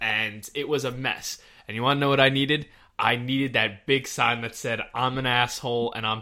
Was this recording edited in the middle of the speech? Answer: no; 0 cuts

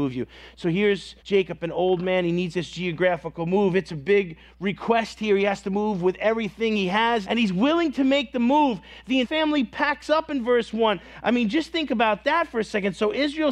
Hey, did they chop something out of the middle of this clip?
yes; 4 cuts; at 1.2 s, 2.5 s, 7.2 s, 9.2 s

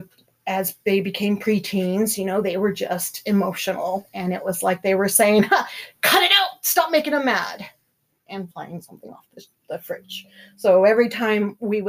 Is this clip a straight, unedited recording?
yes; 0 cuts

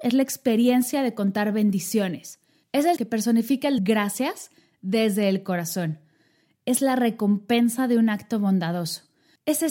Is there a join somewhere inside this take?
yes; 2 cuts; at 3.0 s, 3.8 s

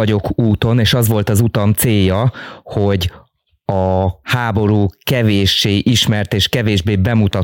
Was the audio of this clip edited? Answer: no; 0 cuts

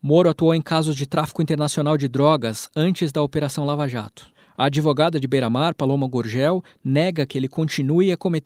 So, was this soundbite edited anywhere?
no; 0 cuts

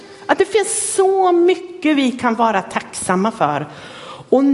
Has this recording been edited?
no; 0 cuts

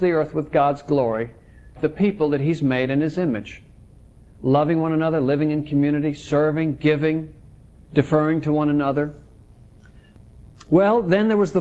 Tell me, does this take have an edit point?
yes; 1 cut; at 1.8 s

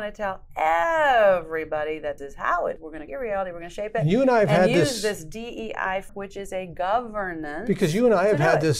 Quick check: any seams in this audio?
yes; 4 cuts; at 2.2 s, 2.8 s, 3.1 s, 6.1 s

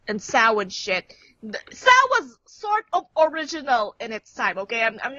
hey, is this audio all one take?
yes; 0 cuts

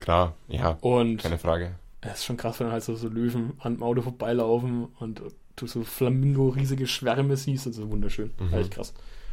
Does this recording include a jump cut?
no; 0 cuts

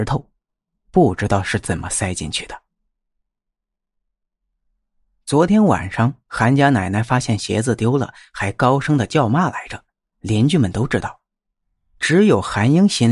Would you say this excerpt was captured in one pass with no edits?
yes; 0 cuts

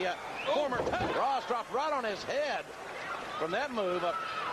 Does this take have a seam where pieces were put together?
yes; 1 cut; at 1.1 s

